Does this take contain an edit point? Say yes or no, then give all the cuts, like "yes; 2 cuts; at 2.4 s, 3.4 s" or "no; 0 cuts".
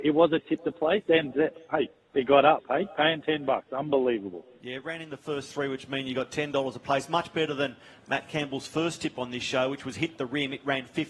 no; 0 cuts